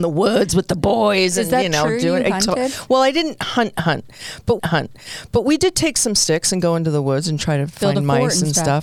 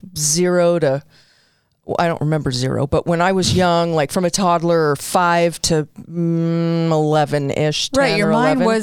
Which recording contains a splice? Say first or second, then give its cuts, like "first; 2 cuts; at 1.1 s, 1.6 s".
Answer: first; 1 cut; at 4.6 s